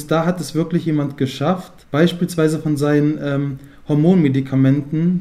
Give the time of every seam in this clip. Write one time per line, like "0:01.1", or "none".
0:01.8